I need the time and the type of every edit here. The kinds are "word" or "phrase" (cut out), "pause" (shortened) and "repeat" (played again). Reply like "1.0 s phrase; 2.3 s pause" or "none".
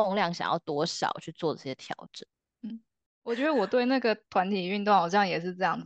none